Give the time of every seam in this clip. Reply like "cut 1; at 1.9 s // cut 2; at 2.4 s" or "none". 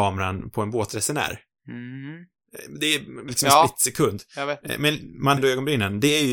cut 1; at 3.3 s // cut 2; at 5.4 s